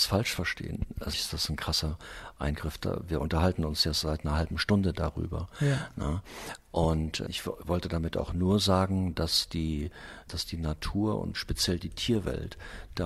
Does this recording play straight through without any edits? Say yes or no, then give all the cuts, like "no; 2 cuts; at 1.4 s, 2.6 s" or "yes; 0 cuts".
no; 3 cuts; at 1.1 s, 7.3 s, 10.3 s